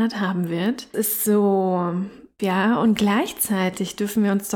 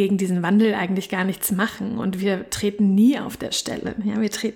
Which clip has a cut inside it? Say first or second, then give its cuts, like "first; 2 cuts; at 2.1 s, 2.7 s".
first; 2 cuts; at 0.9 s, 2.4 s